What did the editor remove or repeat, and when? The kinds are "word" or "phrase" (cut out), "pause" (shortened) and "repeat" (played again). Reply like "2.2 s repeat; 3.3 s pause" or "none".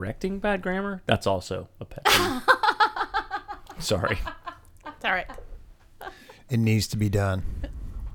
none